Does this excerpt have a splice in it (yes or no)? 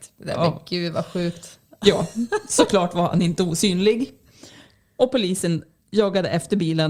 no